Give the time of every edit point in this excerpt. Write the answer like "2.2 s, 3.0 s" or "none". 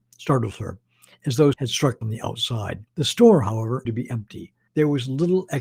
1.5 s, 2.0 s, 2.9 s, 3.9 s, 4.7 s